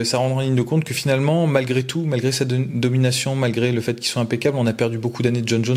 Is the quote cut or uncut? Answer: uncut